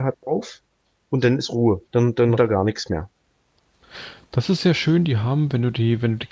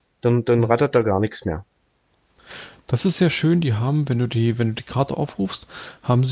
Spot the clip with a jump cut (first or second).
first